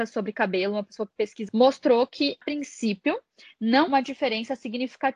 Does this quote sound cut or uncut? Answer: cut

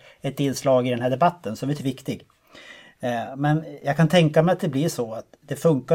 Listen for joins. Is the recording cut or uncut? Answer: cut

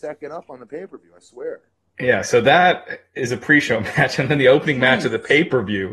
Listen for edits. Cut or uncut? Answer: uncut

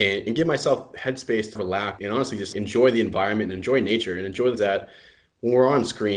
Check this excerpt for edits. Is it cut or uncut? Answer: cut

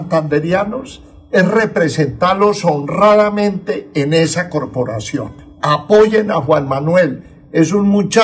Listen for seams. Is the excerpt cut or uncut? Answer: uncut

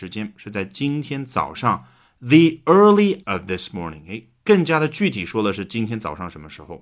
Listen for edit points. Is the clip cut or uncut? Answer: cut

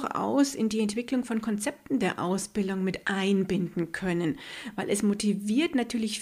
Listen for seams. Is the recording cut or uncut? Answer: uncut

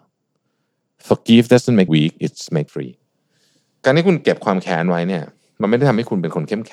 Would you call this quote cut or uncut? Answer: cut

